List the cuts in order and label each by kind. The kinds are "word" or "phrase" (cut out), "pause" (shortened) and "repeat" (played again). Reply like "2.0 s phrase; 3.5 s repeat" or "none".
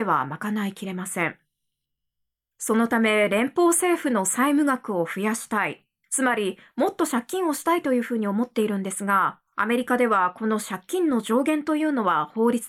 9.5 s pause